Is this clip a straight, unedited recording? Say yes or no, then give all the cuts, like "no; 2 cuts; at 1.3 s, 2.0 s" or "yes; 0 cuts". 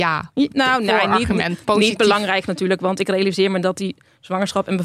no; 1 cut; at 2.4 s